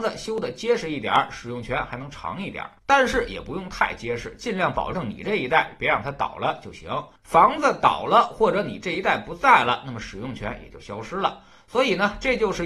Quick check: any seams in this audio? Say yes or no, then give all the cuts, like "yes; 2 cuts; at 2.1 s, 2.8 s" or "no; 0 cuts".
yes; 1 cut; at 2.8 s